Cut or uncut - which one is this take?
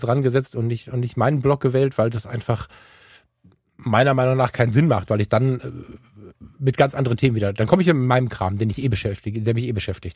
uncut